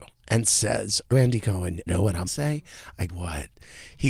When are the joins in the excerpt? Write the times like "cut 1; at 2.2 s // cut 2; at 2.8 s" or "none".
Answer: cut 1; at 1.1 s // cut 2; at 1.9 s // cut 3; at 2.3 s // cut 4; at 3.1 s